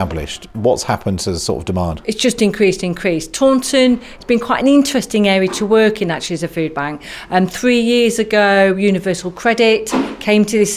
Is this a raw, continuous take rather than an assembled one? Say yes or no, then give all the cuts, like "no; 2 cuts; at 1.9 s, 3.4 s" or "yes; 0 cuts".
yes; 0 cuts